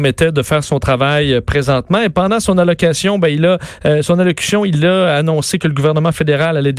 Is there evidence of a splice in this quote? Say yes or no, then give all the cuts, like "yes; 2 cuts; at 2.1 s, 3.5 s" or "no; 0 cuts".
no; 0 cuts